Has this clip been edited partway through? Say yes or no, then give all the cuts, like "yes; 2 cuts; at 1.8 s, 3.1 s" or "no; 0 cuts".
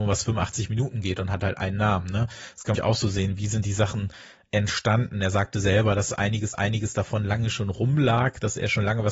yes; 2 cuts; at 2.7 s, 6.5 s